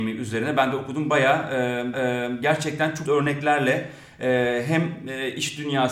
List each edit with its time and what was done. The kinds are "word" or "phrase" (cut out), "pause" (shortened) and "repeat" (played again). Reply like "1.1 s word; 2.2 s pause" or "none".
1.9 s repeat; 3.1 s word